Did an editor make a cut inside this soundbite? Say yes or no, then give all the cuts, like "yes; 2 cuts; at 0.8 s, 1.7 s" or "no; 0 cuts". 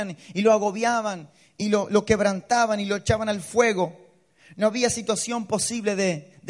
no; 0 cuts